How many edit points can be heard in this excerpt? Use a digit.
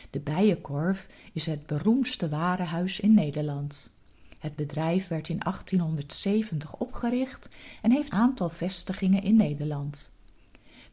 1